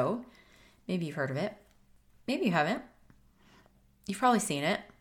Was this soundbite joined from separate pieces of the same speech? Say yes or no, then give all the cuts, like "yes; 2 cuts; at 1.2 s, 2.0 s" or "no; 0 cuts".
no; 0 cuts